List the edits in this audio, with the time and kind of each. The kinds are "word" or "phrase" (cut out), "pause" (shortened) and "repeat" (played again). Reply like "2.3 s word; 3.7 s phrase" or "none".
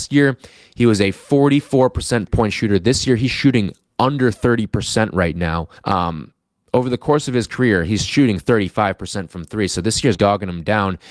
2.3 s word; 5.8 s pause; 10.1 s word